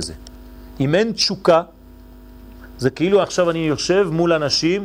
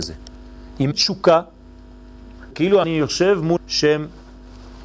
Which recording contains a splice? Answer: second; 4 cuts; at 0.9 s, 2.5 s, 2.8 s, 3.6 s

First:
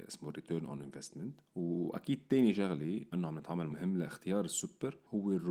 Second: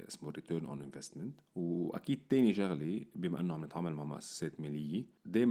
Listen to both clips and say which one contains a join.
first; 2 cuts; at 3.1 s, 3.7 s

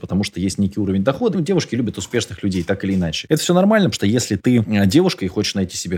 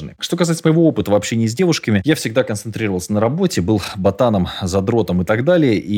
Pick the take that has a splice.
first; 2 cuts; at 1.3 s, 3.9 s

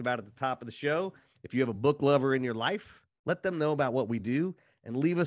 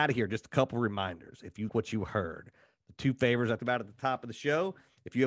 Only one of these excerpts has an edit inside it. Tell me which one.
second; 2 cuts; at 1.7 s, 3.6 s

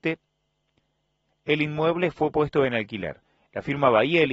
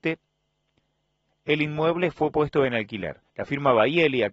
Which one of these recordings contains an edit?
second; 1 cut; at 3.3 s

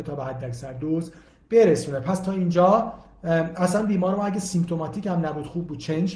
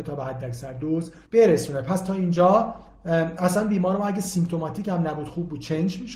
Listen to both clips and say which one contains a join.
second; 1 cut; at 1.3 s

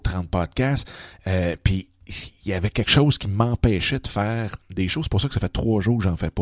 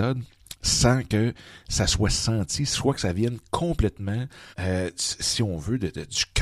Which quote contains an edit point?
second; 1 cut; at 4.5 s

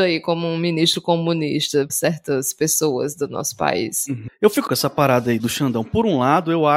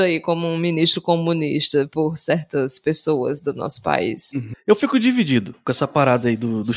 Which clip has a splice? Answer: first; 3 cuts; at 1.9 s, 4.7 s, 5.4 s

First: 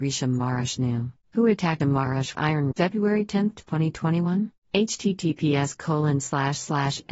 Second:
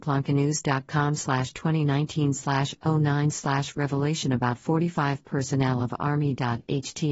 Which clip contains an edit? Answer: first; 5 cuts; at 1.2 s, 1.8 s, 2.3 s, 2.7 s, 4.6 s

